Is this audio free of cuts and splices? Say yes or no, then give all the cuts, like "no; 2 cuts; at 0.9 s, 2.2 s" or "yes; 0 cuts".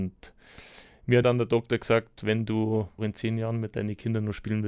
no; 2 cuts; at 1.2 s, 3.0 s